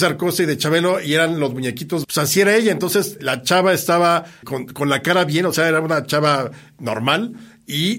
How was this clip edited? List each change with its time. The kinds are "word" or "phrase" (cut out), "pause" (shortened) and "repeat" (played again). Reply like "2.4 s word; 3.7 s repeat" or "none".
2.0 s word; 3.2 s word; 4.4 s word